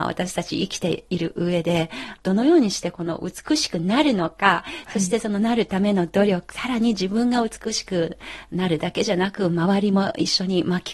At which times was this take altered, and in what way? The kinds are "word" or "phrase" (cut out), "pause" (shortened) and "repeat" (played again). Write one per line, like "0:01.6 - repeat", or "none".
0:06.5 - phrase